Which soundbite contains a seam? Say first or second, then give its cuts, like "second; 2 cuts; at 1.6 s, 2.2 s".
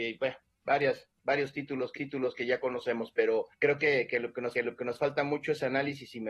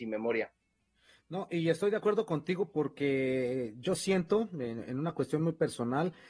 first; 3 cuts; at 2.0 s, 3.5 s, 4.5 s